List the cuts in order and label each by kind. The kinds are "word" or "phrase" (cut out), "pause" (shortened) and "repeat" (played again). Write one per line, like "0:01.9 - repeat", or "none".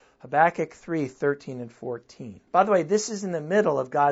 0:02.5 - pause